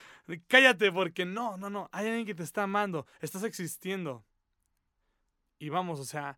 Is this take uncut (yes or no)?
yes